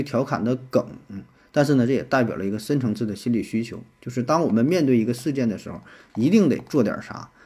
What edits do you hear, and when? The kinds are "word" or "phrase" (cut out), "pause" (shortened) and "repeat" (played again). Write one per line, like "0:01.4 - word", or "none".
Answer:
none